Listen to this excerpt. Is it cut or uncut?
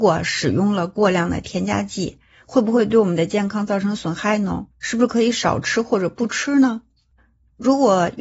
cut